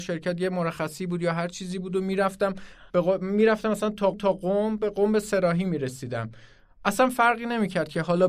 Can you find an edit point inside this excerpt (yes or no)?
yes